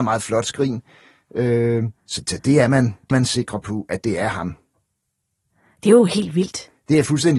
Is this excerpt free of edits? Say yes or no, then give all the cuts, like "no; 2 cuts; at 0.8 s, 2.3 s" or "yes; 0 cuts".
no; 2 cuts; at 2.0 s, 3.1 s